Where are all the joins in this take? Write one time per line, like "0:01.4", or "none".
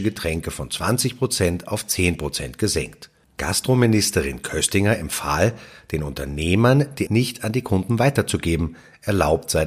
0:07.1